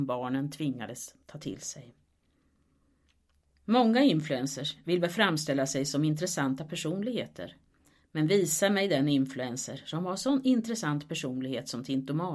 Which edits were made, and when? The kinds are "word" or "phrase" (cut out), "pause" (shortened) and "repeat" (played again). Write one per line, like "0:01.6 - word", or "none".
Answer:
none